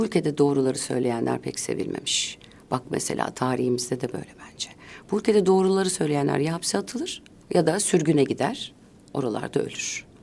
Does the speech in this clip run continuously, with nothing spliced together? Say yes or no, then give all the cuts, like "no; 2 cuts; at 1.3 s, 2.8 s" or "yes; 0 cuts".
yes; 0 cuts